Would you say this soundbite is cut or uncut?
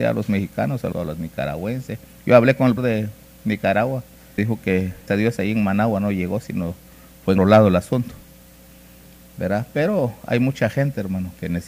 cut